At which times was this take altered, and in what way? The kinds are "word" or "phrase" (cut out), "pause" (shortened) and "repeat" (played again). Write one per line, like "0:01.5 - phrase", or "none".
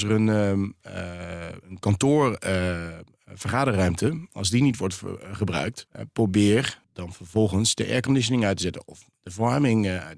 0:01.6 - word
0:05.9 - pause
0:06.8 - word